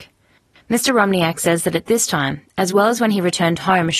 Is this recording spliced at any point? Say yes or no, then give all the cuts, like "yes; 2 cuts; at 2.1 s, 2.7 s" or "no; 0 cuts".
no; 0 cuts